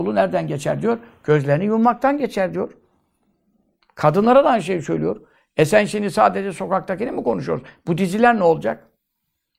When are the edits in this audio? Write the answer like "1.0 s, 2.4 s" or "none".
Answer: none